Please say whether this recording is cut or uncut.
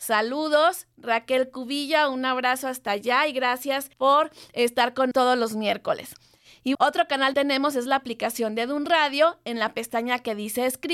cut